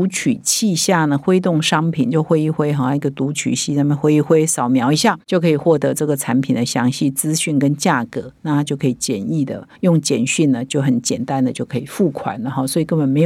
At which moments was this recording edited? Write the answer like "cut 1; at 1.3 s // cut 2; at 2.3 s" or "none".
cut 1; at 9.8 s